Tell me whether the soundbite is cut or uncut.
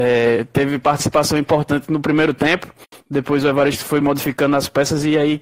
uncut